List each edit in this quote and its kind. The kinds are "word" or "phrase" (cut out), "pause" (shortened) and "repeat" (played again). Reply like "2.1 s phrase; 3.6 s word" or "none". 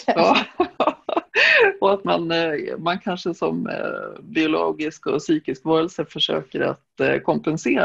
none